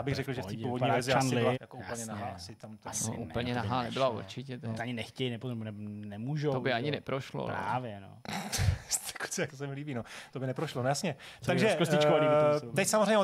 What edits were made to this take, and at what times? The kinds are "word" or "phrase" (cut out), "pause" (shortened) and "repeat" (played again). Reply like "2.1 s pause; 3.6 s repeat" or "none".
1.5 s phrase; 4.8 s word; 9.5 s word